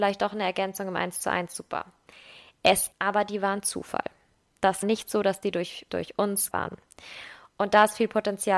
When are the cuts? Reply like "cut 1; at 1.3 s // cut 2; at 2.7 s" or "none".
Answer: cut 1; at 2.9 s // cut 2; at 4.8 s // cut 3; at 5.9 s // cut 4; at 6.5 s